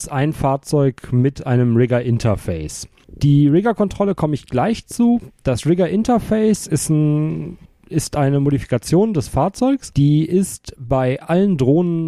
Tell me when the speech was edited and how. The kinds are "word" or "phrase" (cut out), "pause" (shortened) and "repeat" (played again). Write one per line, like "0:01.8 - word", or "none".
0:07.7 - pause